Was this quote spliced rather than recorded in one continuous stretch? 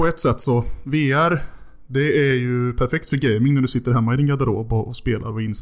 no; 0 cuts

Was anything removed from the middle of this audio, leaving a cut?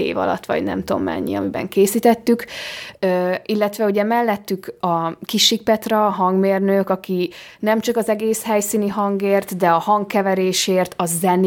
no; 0 cuts

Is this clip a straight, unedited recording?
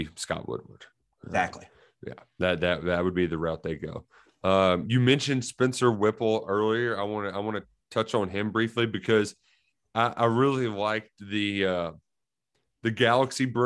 yes; 0 cuts

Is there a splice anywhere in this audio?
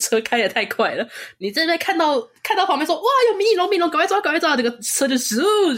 no; 0 cuts

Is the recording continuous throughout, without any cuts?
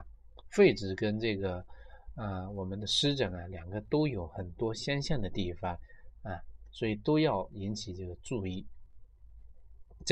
yes; 0 cuts

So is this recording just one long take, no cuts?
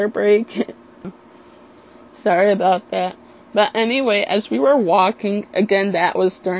yes; 0 cuts

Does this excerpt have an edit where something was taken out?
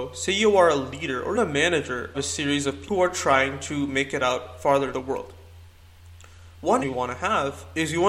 yes; 5 cuts; at 1.3 s, 2.1 s, 2.9 s, 4.9 s, 6.8 s

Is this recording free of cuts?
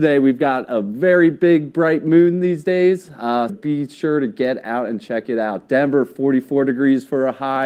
no; 1 cut; at 3.5 s

